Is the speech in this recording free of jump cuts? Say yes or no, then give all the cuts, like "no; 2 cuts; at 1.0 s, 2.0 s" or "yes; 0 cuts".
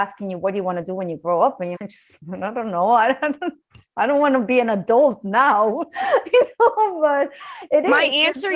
no; 1 cut; at 1.8 s